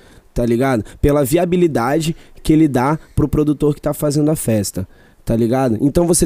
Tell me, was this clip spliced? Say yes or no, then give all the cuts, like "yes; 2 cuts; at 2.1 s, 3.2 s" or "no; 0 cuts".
no; 0 cuts